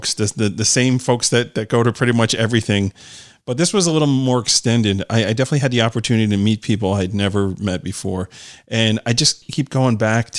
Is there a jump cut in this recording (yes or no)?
no